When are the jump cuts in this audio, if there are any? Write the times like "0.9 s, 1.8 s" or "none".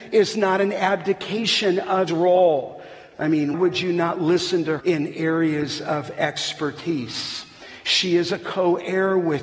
2.1 s, 3.5 s, 4.8 s